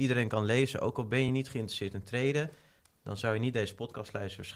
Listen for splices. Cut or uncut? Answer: uncut